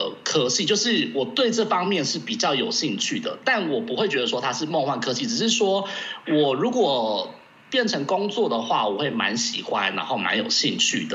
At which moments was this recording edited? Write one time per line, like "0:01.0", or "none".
none